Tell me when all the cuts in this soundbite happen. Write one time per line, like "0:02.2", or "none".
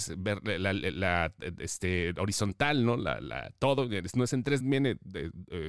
0:04.6